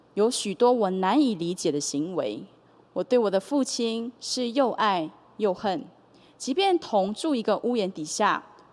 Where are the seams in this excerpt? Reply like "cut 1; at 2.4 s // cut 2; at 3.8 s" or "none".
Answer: none